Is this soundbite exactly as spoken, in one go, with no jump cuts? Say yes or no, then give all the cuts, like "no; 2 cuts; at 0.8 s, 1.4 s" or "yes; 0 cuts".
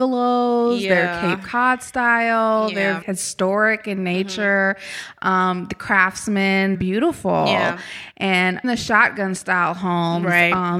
no; 3 cuts; at 3.0 s, 6.7 s, 8.6 s